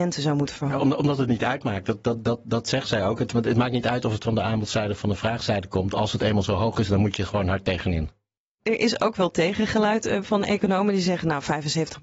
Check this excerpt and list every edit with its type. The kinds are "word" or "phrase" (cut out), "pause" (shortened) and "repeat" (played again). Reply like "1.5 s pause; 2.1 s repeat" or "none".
none

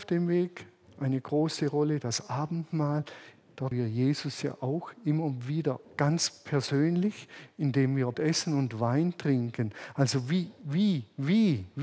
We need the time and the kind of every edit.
3.7 s word; 5.8 s word; 8.1 s word

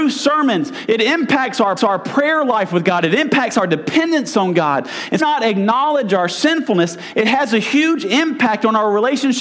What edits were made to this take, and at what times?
1.8 s repeat; 5.2 s phrase

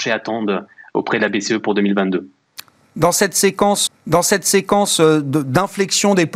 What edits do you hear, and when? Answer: 3.9 s repeat

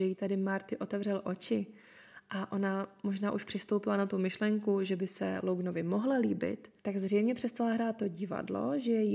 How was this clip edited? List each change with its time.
6.8 s pause

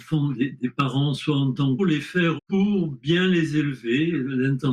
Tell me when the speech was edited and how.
1.8 s phrase; 2.4 s word

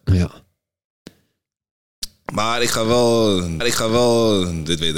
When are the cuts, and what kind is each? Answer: 3.6 s repeat

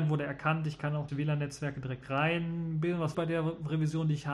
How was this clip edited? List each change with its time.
1.1 s word; 3.1 s word

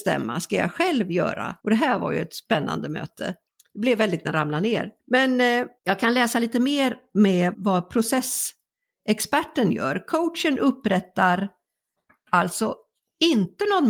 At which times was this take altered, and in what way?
1.6 s pause; 3.5 s pause; 4.2 s phrase; 5.0 s pause; 5.8 s pause; 7.5 s word

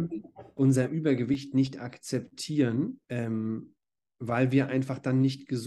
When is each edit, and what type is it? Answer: 3.0 s pause

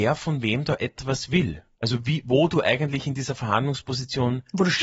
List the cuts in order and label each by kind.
1.7 s pause

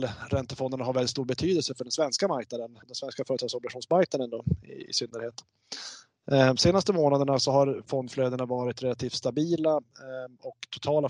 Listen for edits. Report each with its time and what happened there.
2.8 s pause

